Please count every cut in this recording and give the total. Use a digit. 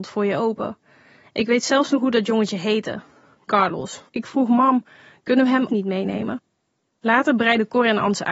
2